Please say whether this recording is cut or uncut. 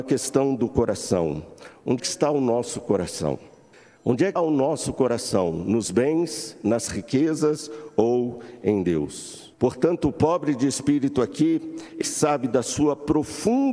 cut